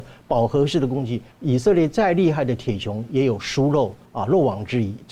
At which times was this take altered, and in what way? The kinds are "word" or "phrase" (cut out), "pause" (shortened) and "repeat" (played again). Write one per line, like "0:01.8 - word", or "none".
0:01.3 - pause
0:04.1 - pause